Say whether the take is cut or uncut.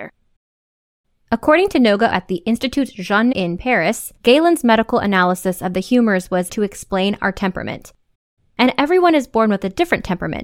cut